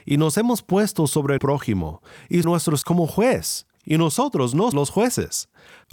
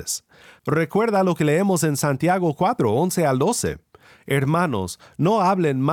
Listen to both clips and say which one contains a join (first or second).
first